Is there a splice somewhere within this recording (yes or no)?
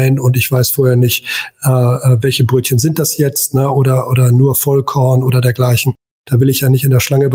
no